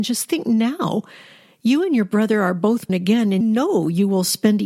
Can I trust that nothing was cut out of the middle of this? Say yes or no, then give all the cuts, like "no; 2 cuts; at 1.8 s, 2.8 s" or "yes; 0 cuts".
no; 2 cuts; at 2.9 s, 3.4 s